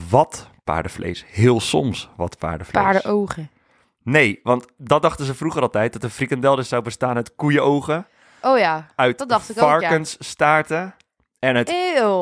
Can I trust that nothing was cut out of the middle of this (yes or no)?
yes